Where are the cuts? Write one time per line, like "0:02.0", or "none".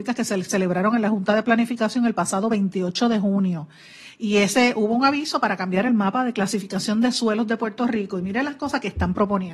none